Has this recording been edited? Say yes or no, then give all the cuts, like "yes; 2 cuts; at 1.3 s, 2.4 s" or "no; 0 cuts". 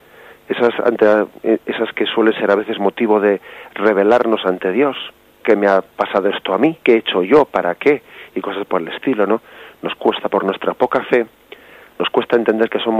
yes; 2 cuts; at 5.4 s, 6.8 s